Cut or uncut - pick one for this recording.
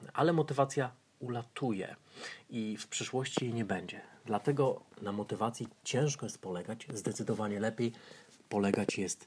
cut